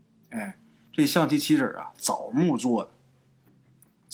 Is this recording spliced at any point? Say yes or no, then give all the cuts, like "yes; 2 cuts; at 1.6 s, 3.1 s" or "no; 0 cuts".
no; 0 cuts